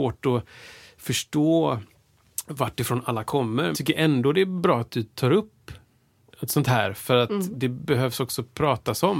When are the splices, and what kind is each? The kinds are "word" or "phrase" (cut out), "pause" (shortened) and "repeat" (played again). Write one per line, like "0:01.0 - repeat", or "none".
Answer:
0:03.7 - word

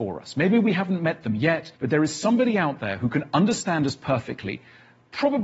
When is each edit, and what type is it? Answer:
0:01.8 - pause

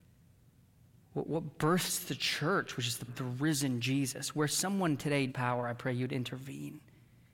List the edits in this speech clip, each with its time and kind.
0:03.1 - word
0:05.3 - word

